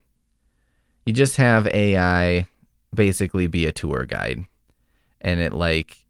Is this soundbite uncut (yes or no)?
yes